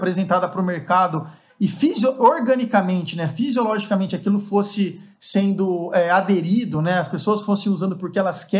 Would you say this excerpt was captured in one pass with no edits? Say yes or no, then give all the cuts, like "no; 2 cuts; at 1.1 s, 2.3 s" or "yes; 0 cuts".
yes; 0 cuts